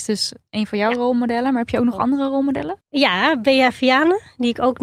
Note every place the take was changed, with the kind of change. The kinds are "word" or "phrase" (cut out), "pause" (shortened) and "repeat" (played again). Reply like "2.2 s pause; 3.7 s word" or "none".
2.8 s pause